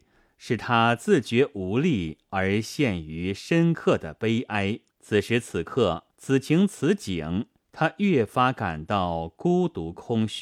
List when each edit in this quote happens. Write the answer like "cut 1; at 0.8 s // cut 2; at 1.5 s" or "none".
cut 1; at 4.9 s // cut 2; at 6.1 s // cut 3; at 7.6 s